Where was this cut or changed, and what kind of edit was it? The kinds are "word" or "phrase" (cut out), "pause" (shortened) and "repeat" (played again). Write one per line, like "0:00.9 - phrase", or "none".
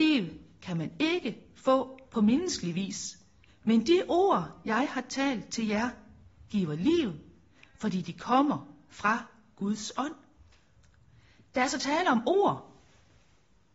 0:03.5 - pause